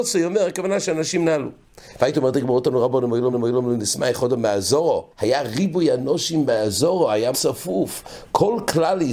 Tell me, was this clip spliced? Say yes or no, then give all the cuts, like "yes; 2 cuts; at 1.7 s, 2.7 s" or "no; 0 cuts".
yes; 3 cuts; at 3.3 s, 5.1 s, 7.3 s